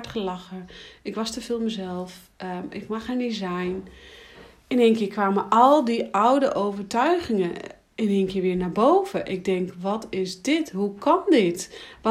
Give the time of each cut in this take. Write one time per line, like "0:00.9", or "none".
none